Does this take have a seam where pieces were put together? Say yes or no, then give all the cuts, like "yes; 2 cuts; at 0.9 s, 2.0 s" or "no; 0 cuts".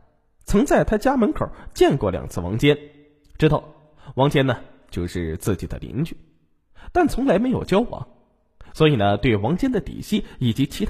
no; 0 cuts